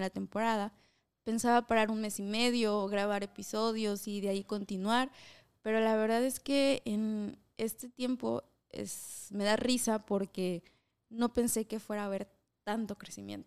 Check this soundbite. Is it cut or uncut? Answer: uncut